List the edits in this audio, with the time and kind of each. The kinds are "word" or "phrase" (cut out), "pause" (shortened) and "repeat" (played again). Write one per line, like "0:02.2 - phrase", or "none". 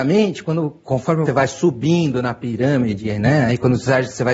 0:01.3 - word